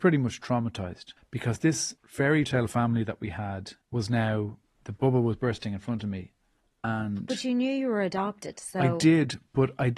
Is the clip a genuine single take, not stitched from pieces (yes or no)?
no